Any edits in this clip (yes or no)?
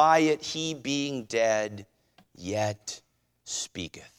no